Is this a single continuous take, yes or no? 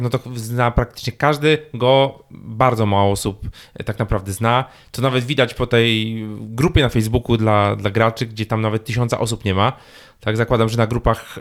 yes